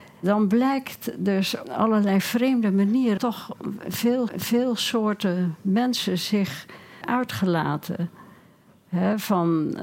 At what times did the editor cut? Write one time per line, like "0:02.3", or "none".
0:01.6
0:03.2
0:04.3
0:07.0